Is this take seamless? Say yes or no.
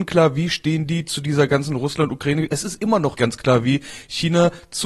no